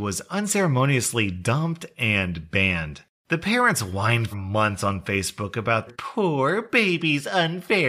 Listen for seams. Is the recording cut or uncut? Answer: cut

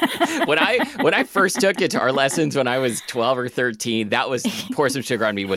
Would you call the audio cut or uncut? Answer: cut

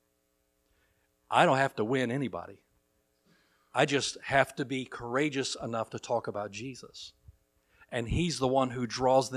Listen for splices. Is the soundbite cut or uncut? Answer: uncut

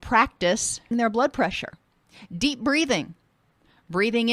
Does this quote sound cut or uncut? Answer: cut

